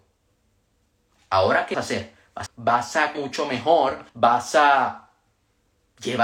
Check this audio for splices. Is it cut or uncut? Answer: cut